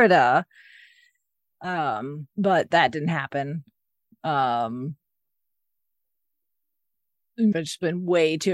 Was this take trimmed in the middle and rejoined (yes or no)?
yes